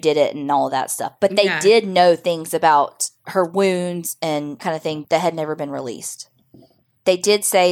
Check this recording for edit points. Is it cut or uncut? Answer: cut